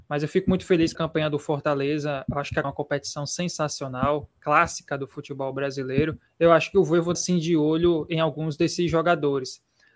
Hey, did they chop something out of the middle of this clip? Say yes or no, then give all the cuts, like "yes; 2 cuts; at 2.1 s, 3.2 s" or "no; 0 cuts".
yes; 4 cuts; at 0.9 s, 2.6 s, 6.3 s, 7.1 s